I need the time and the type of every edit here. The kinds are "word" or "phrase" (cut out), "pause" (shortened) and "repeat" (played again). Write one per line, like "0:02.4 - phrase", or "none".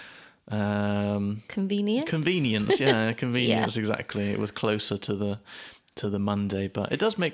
none

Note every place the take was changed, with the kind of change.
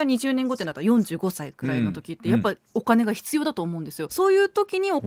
0:04.1 - phrase

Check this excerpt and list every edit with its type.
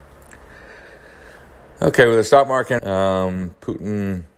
0:02.8 - word

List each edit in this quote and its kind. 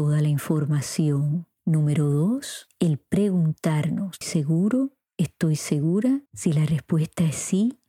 0:04.2 - word
0:06.3 - pause

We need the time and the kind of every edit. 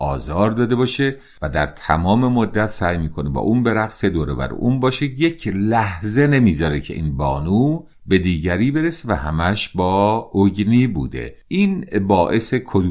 none

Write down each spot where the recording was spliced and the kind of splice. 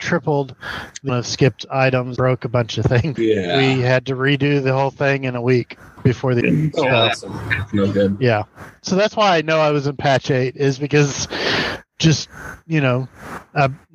0:01.1 - word
0:02.2 - word
0:03.2 - word
0:06.4 - word
0:11.9 - word

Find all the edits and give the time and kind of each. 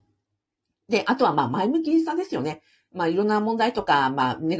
none

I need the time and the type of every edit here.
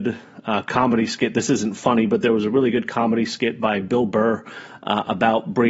none

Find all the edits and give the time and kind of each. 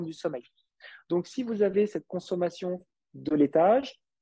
none

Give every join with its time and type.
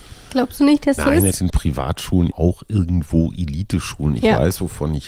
0:01.0 - word
0:01.3 - word
0:02.3 - word

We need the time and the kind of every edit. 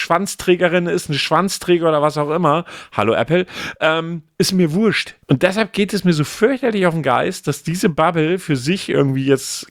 0:05.2 - pause

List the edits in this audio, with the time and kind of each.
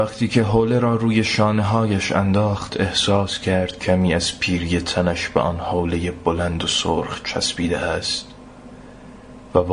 none

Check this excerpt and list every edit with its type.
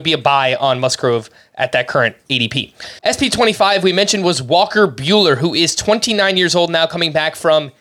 0:03.0 - pause

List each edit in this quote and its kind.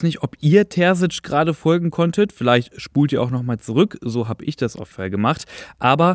0:04.9 - word

